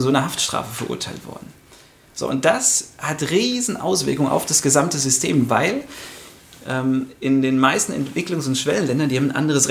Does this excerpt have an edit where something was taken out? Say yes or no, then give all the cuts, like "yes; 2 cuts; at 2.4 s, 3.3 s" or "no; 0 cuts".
no; 0 cuts